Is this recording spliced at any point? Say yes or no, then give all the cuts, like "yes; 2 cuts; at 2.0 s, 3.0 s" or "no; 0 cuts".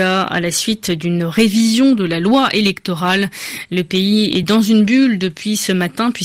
no; 0 cuts